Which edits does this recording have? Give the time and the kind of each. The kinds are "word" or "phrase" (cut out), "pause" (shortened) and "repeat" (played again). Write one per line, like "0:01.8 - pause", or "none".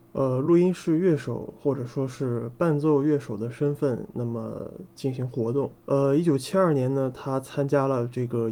0:05.8 - pause